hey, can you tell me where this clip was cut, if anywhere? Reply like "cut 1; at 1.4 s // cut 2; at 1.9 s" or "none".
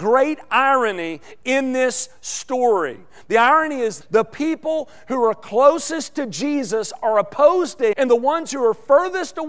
cut 1; at 4.0 s // cut 2; at 7.9 s

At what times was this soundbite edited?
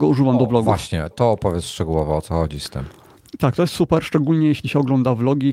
cut 1; at 1.1 s

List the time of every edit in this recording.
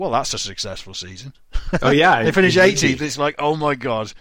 none

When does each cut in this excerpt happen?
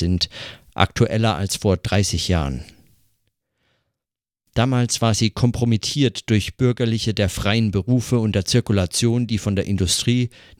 none

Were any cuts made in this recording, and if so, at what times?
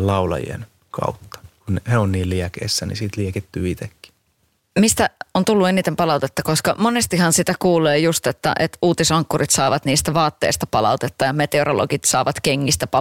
none

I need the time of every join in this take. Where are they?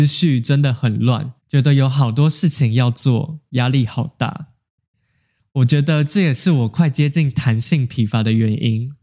cut 1; at 1.4 s

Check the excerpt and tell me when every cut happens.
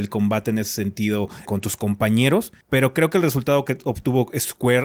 cut 1; at 1.5 s // cut 2; at 2.6 s

